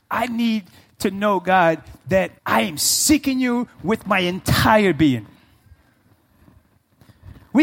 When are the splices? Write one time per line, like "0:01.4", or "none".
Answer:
0:02.4